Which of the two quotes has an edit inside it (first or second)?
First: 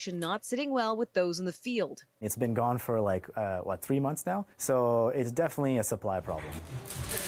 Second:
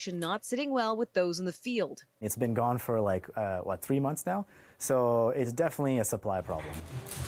first